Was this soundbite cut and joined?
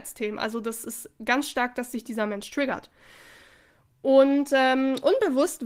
no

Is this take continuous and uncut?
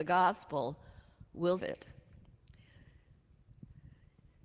no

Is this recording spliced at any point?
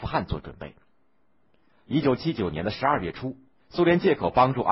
no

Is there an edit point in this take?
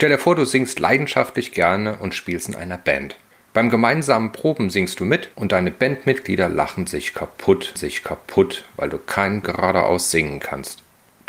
yes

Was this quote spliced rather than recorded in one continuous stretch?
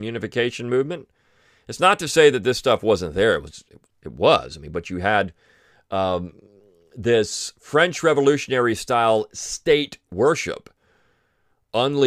no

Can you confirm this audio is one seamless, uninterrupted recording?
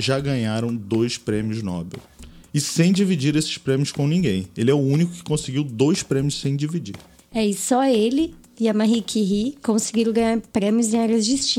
yes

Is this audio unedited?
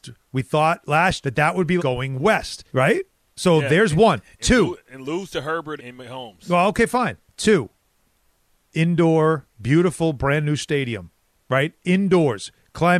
no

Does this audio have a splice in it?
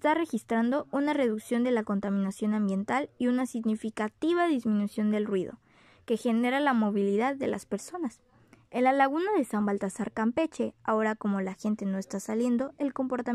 no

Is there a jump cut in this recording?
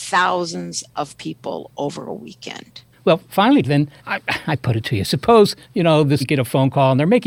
yes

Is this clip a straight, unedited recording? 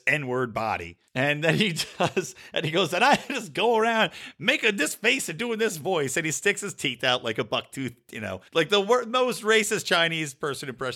no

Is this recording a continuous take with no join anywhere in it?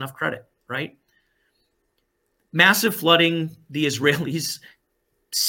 yes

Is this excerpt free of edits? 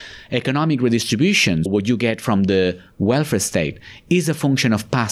no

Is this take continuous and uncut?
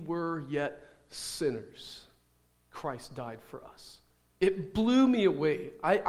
yes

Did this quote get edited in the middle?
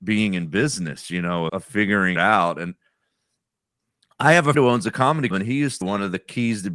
yes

